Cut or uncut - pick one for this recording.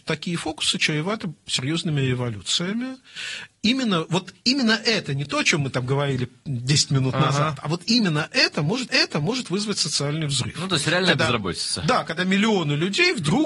cut